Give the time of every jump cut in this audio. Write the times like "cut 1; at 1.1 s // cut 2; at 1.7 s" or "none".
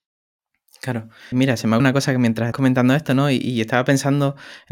cut 1; at 1.3 s // cut 2; at 1.8 s // cut 3; at 2.5 s